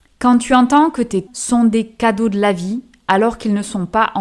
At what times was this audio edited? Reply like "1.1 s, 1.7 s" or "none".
1.3 s

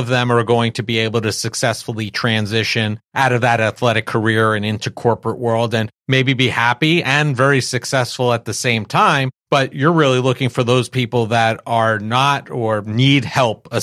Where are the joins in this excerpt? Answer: none

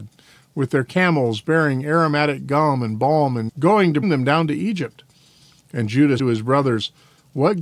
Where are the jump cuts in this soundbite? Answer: 3.5 s, 4.0 s, 6.2 s

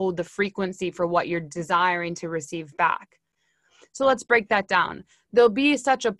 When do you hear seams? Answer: none

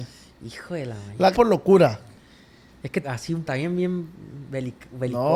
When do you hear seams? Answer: 1.3 s, 3.0 s, 3.4 s

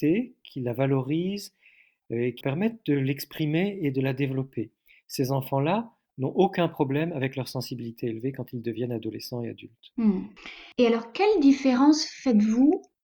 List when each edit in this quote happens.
2.4 s

